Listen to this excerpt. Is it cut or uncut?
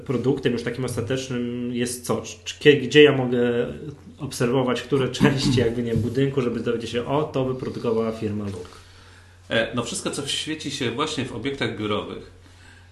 uncut